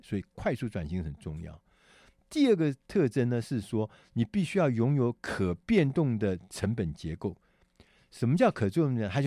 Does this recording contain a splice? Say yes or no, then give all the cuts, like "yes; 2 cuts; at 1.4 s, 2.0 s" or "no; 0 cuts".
no; 0 cuts